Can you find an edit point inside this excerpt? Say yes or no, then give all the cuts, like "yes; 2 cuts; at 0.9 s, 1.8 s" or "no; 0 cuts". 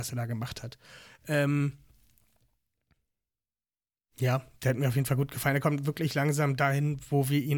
no; 0 cuts